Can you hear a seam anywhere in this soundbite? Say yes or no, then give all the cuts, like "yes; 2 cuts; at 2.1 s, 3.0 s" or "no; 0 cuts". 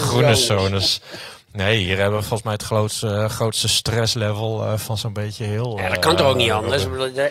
no; 0 cuts